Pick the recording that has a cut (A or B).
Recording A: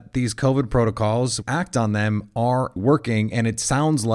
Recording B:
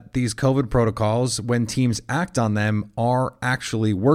A